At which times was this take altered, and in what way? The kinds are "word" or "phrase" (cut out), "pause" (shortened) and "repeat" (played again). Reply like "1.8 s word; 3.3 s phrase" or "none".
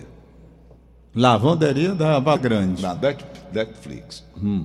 2.4 s word